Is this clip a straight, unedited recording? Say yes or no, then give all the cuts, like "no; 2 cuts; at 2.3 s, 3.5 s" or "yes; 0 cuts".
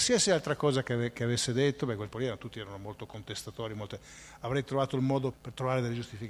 no; 2 cuts; at 2.1 s, 5.3 s